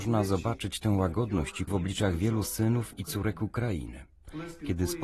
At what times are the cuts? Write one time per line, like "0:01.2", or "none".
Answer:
0:01.7

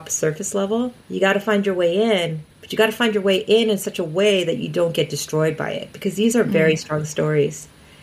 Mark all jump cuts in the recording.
0:01.0
0:02.5

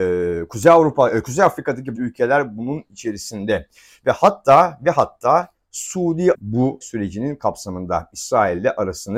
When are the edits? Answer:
0:01.9
0:06.3
0:06.8

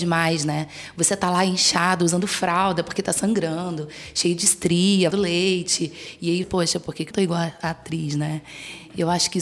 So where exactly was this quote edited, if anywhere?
0:05.1
0:06.4
0:07.1

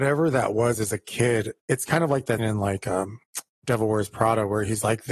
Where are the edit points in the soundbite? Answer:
0:02.4

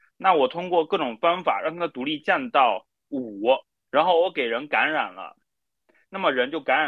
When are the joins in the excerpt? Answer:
0:03.9

